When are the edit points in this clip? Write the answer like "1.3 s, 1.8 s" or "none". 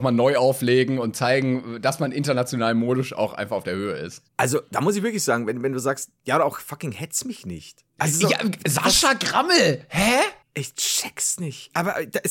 4.3 s, 7.9 s, 10.4 s